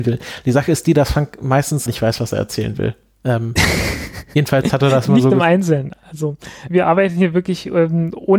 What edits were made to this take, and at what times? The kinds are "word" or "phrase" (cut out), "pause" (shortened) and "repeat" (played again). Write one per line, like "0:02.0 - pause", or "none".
0:01.9 - word
0:06.7 - word